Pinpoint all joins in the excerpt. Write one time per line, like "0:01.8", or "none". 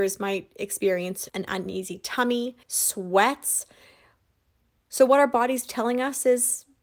0:01.3
0:02.6